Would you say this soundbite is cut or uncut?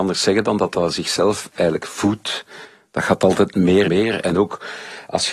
cut